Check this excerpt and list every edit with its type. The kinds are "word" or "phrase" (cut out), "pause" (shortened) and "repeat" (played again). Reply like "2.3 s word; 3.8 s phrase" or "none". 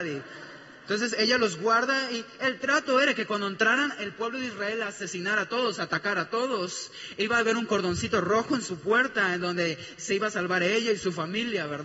none